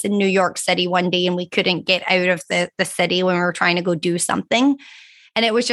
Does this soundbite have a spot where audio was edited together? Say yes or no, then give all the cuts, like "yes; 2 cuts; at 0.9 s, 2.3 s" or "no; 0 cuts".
no; 0 cuts